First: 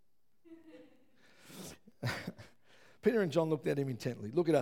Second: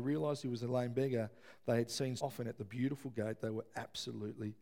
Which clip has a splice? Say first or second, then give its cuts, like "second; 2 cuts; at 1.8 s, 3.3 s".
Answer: second; 1 cut; at 2.2 s